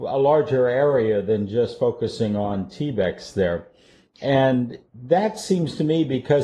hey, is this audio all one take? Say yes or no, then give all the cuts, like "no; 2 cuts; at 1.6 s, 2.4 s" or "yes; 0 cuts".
yes; 0 cuts